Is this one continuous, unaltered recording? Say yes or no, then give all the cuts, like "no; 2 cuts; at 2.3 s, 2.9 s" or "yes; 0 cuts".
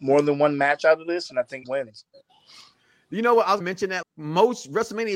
no; 3 cuts; at 1.6 s, 3.6 s, 4.0 s